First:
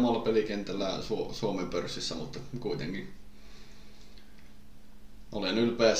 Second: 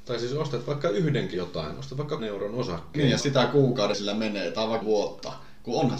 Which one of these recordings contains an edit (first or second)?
second